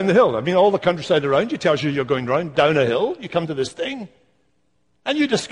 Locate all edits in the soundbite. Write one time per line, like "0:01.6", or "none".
none